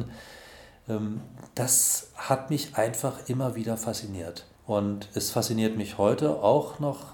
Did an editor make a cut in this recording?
yes; 1 cut; at 4.5 s

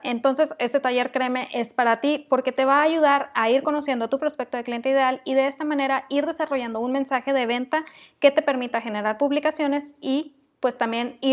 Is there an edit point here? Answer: no; 0 cuts

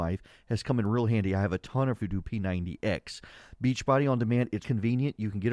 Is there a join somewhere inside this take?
yes; 2 cuts; at 2.0 s, 4.6 s

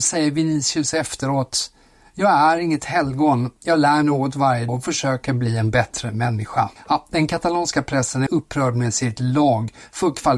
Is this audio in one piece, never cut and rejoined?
no; 3 cuts; at 4.0 s, 4.7 s, 8.3 s

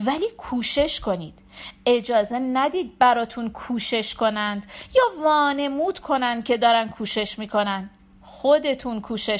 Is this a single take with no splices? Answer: yes; 0 cuts

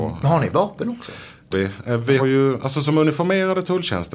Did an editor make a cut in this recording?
yes; 2 cuts; at 1.5 s, 2.2 s

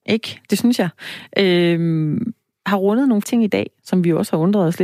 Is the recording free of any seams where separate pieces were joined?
no; 2 cuts; at 2.5 s, 3.2 s

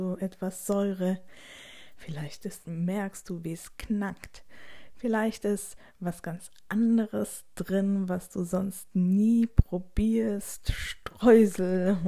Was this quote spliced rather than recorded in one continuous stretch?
yes; 1 cut; at 2.6 s

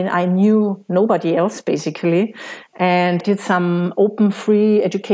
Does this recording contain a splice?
yes; 1 cut; at 3.2 s

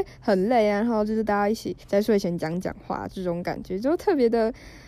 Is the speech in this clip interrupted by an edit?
yes; 1 cut; at 1.8 s

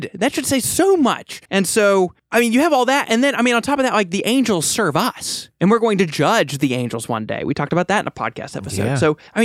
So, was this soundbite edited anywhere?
yes; 1 cut; at 1.5 s

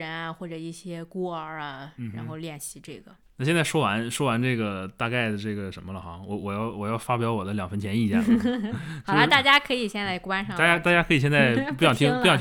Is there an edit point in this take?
no; 0 cuts

